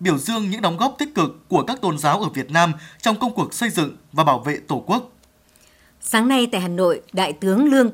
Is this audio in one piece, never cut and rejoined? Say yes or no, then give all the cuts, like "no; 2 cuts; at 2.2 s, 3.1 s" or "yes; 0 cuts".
yes; 0 cuts